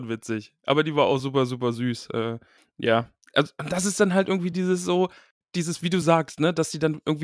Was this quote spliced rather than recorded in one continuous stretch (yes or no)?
no